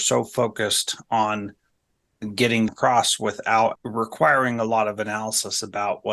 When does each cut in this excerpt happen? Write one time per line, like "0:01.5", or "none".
0:02.7
0:03.8